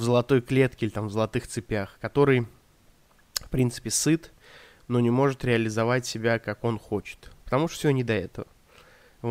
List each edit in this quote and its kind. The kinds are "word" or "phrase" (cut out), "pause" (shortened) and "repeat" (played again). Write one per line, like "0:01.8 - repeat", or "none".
none